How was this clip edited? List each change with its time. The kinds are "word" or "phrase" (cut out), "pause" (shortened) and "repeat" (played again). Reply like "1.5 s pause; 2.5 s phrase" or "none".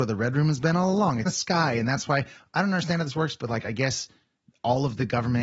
1.2 s word